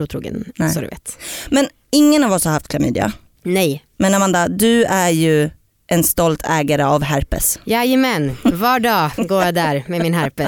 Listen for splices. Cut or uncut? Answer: uncut